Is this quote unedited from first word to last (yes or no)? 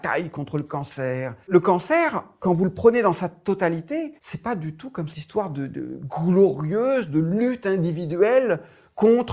no